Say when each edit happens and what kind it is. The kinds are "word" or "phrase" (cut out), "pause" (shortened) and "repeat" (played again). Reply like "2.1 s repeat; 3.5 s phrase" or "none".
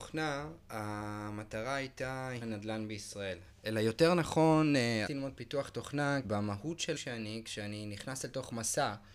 2.4 s phrase; 5.1 s word; 6.2 s word; 7.0 s word

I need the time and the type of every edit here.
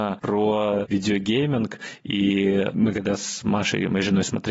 none

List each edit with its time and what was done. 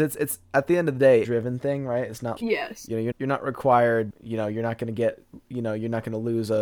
1.2 s phrase; 2.4 s word; 3.1 s word; 4.1 s word

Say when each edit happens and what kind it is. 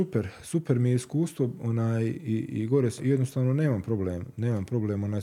3.0 s word

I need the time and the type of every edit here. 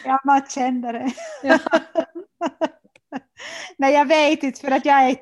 none

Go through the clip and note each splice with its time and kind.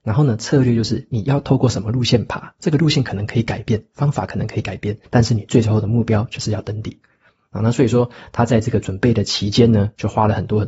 5.1 s pause

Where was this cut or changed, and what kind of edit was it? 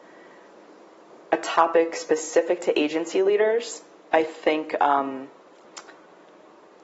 none

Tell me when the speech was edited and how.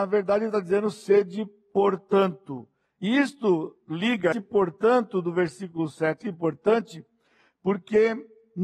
4.3 s word; 6.2 s word

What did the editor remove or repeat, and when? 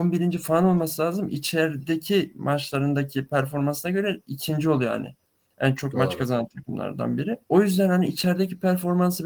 7.4 s pause

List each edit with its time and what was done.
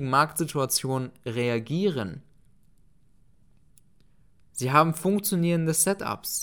none

